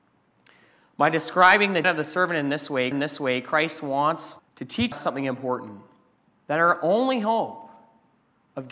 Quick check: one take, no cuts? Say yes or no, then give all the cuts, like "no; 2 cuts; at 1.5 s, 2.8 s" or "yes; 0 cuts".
no; 5 cuts; at 1.8 s, 2.9 s, 4.4 s, 4.9 s, 6.2 s